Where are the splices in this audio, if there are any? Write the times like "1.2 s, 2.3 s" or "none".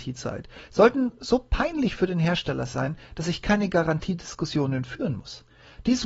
none